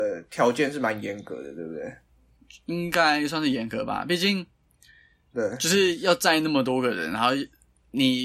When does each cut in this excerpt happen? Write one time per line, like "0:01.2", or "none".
none